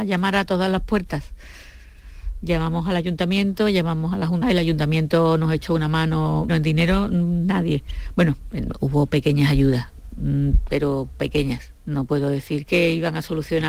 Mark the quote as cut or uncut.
cut